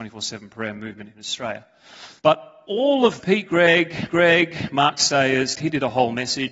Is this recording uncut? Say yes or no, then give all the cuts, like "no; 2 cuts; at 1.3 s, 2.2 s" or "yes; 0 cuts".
no; 4 cuts; at 2.2 s, 3.2 s, 4.1 s, 5.5 s